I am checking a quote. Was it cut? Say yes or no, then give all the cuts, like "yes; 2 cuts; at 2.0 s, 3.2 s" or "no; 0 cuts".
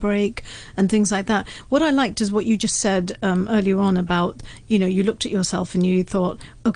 no; 0 cuts